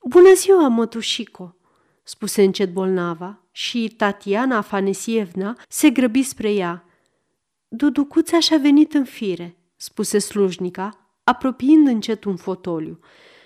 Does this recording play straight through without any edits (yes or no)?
no